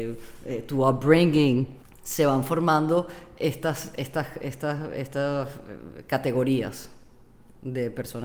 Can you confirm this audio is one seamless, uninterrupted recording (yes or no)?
no